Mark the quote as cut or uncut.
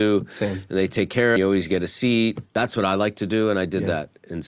cut